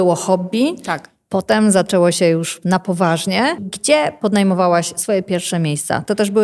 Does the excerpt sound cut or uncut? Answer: uncut